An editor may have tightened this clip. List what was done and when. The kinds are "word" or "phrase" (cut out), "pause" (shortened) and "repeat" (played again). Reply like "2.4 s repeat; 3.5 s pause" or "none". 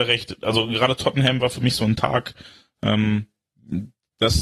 none